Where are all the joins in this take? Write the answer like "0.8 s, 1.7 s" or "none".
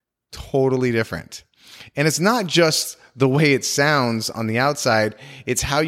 none